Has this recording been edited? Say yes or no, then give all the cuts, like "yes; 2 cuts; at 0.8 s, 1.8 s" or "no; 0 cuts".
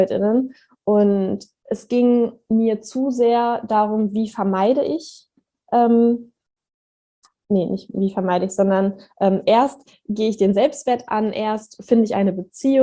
no; 0 cuts